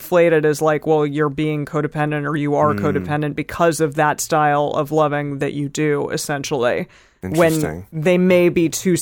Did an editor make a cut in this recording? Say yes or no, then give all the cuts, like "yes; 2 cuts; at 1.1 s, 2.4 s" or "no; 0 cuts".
no; 0 cuts